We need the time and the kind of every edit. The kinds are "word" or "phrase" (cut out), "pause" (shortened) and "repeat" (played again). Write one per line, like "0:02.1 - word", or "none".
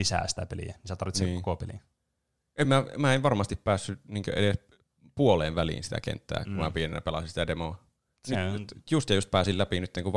none